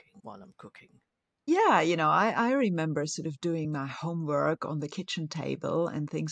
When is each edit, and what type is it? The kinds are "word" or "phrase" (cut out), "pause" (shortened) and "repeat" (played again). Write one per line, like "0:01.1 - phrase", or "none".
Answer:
none